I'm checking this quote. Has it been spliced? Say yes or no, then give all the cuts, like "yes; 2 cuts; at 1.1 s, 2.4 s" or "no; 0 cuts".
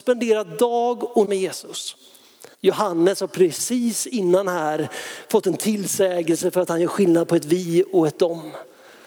yes; 2 cuts; at 1.2 s, 2.5 s